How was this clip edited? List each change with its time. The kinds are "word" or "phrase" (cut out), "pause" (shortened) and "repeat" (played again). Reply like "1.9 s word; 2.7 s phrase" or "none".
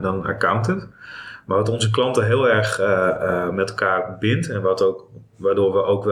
none